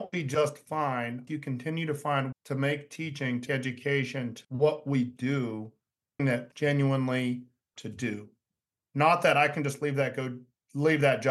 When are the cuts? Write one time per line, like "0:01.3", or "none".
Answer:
0:01.3
0:02.3
0:03.5
0:04.4
0:06.2
0:06.5
0:07.7

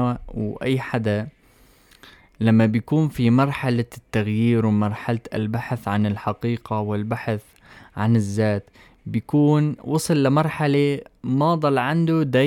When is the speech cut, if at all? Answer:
none

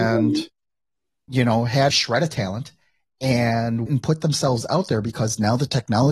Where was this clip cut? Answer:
0:01.9
0:03.9

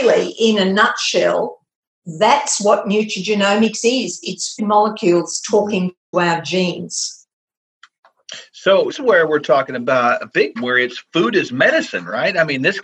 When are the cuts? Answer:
0:04.6
0:06.1
0:08.9
0:10.6

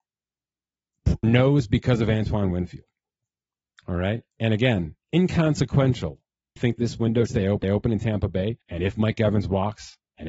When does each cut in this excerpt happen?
0:01.2
0:04.3
0:06.6
0:07.3
0:07.6
0:08.6

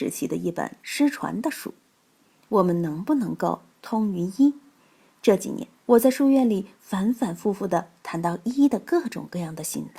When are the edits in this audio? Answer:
0:05.8

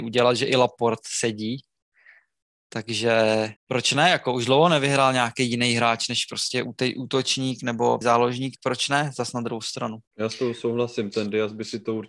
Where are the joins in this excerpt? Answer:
0:03.6
0:08.0
0:08.6
0:10.1

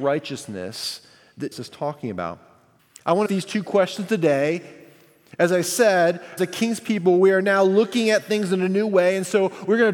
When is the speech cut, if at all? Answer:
0:01.5
0:02.8
0:03.3
0:06.4

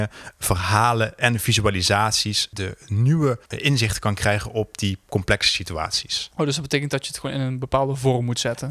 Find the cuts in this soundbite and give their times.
0:03.5

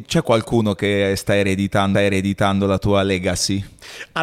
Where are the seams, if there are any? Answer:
0:01.9

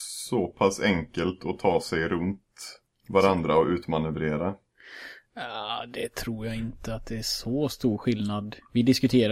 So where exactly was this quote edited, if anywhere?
0:02.8

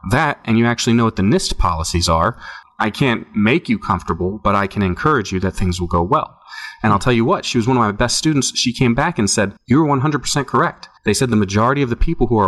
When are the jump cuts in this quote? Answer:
0:09.6
0:11.0

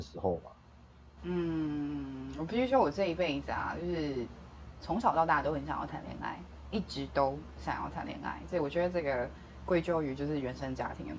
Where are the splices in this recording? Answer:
none

